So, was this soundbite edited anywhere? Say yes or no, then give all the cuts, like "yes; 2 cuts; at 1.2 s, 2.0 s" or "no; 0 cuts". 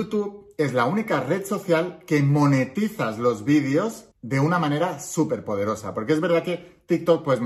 yes; 1 cut; at 4.1 s